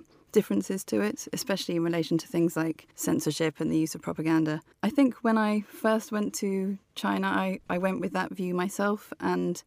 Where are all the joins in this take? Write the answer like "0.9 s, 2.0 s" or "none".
2.9 s, 4.7 s